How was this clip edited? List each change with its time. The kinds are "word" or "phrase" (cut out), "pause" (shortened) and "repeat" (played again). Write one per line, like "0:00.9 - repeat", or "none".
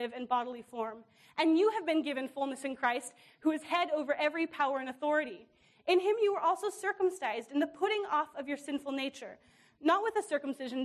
none